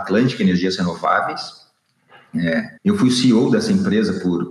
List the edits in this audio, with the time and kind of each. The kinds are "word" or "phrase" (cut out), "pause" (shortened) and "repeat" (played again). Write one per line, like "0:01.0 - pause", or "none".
0:02.8 - pause